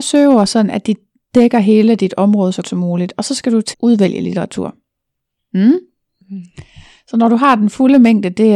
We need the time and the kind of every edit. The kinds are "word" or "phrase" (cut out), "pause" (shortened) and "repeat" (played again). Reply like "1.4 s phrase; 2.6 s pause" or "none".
2.6 s word; 3.7 s word